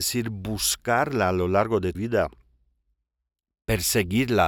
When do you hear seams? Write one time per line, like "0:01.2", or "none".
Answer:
0:01.9